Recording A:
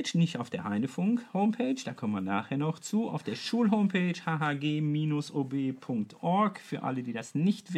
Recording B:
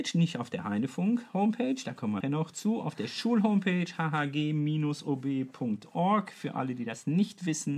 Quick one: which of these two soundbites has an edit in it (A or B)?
B